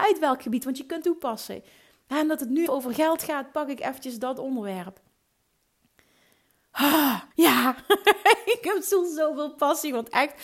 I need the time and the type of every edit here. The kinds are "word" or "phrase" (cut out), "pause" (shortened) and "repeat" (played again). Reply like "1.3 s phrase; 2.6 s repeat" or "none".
1.0 s phrase; 2.7 s word; 7.3 s pause